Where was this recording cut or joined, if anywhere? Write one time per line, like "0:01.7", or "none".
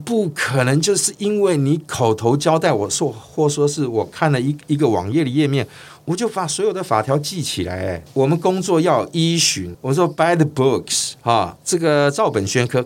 0:11.2